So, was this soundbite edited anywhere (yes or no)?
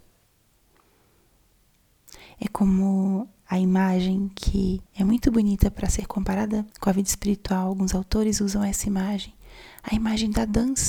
yes